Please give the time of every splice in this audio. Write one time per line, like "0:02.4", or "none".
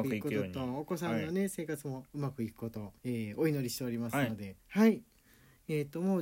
0:03.0
0:04.6

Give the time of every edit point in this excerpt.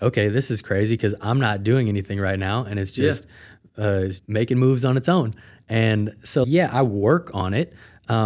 0:04.2
0:06.4

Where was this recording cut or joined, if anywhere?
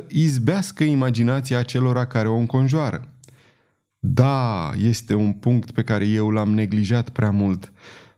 none

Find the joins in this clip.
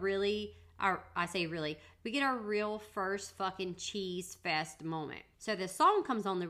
0:05.3

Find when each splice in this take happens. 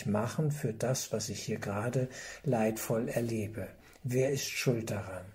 none

